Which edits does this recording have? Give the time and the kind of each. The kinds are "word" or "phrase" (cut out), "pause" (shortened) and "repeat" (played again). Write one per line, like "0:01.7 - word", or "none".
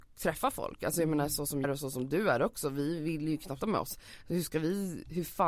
0:01.6 - word
0:03.6 - phrase

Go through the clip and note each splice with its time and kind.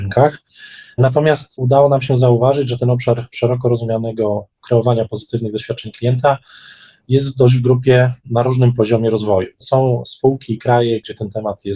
none

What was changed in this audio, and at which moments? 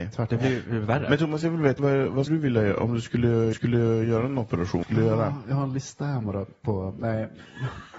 0:01.8 - word
0:02.3 - word
0:03.5 - repeat
0:04.8 - word

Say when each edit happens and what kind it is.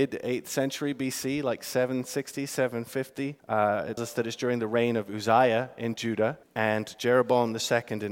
0:03.4 - pause
0:04.0 - word
0:06.4 - pause

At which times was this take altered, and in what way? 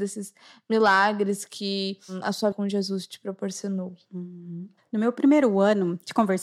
0:02.5 - word

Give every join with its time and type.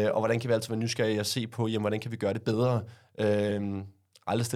none

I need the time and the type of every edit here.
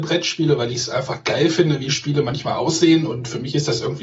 none

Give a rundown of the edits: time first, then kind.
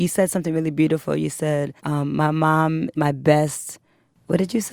0:01.8 - pause
0:02.9 - word

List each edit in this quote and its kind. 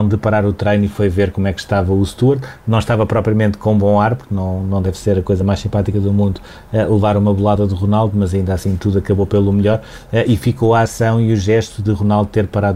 none

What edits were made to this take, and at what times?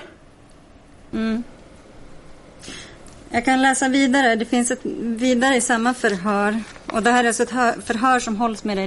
none

